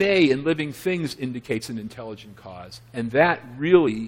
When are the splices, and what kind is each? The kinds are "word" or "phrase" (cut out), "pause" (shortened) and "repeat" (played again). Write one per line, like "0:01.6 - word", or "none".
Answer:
none